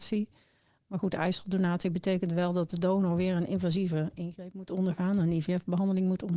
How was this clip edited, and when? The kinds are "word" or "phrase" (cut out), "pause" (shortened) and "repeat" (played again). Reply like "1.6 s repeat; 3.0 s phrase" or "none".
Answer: none